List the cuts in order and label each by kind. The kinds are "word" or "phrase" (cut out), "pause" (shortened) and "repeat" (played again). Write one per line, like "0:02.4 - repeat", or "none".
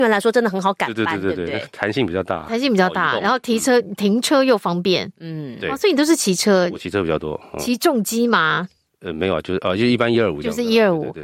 none